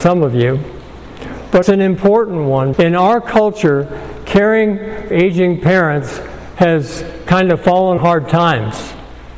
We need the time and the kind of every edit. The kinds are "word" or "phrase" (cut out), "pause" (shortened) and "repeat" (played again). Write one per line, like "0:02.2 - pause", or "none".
0:01.6 - word
0:02.7 - word
0:05.1 - word
0:08.0 - word